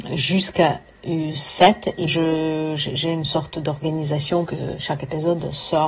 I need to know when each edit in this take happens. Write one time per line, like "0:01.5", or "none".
0:02.1
0:04.5